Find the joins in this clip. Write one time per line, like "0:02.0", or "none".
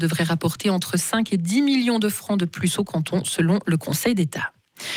none